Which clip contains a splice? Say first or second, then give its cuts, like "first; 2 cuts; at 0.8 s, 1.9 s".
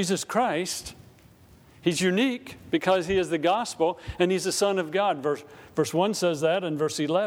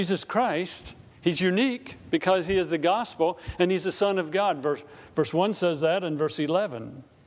second; 1 cut; at 1.1 s